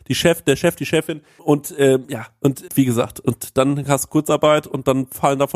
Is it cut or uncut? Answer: cut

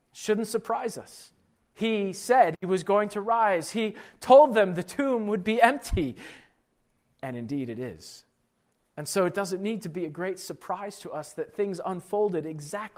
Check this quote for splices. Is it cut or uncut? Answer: uncut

